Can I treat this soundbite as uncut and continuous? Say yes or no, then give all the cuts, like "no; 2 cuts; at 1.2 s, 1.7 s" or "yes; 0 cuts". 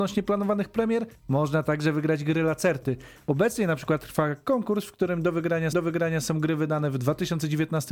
no; 1 cut; at 5.7 s